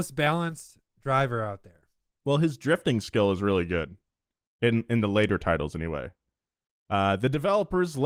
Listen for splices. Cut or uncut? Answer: uncut